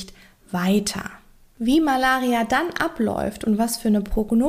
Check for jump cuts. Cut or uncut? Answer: uncut